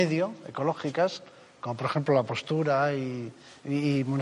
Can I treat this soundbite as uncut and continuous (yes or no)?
yes